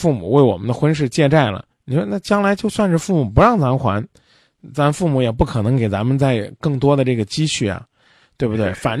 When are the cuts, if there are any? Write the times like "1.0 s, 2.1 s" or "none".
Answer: 1.7 s